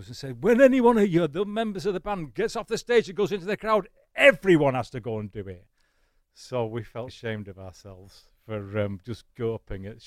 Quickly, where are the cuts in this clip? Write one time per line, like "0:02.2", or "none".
0:07.1